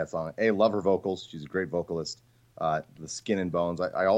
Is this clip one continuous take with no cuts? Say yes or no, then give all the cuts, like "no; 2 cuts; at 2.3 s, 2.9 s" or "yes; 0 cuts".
yes; 0 cuts